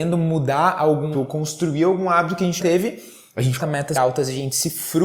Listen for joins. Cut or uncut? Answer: cut